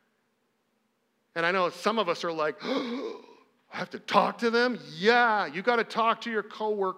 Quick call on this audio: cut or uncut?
uncut